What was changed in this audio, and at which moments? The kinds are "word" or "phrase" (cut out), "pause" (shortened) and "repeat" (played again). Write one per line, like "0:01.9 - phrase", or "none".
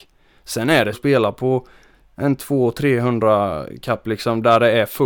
0:00.9 - word